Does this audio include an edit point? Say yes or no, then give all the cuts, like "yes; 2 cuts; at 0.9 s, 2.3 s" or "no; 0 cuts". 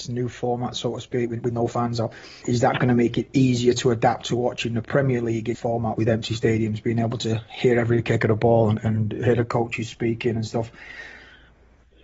yes; 3 cuts; at 2.4 s, 5.5 s, 6.0 s